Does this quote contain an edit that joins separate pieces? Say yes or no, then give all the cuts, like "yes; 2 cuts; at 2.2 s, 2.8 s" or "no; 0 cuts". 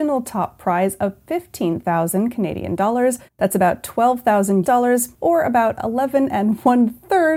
yes; 3 cuts; at 3.3 s, 4.6 s, 5.1 s